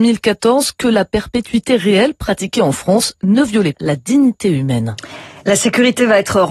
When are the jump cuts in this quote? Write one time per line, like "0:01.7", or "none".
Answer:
0:03.7

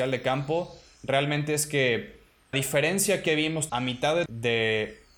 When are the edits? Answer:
0:02.5
0:03.7
0:04.3

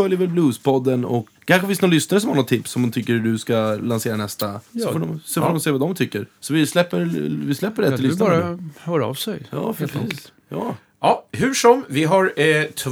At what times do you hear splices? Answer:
0:01.3
0:04.7
0:06.4

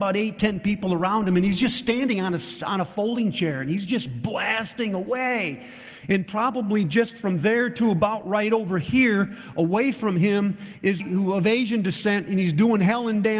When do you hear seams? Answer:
0:11.0

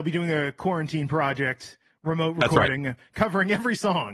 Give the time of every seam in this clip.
none

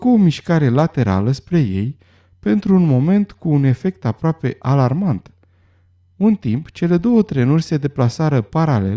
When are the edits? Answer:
none

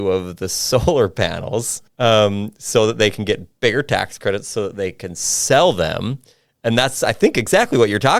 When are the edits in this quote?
0:01.9

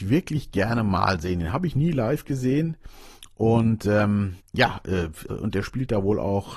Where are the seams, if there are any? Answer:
0:04.4
0:05.3

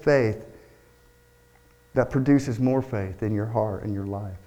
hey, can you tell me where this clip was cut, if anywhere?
none

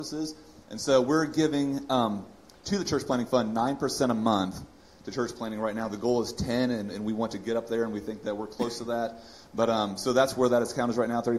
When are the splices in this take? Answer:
none

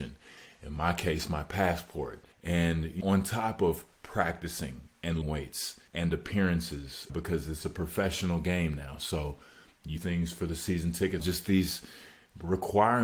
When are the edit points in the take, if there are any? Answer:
0:02.3
0:03.0
0:03.9
0:05.2
0:05.9
0:07.1
0:10.0
0:11.2

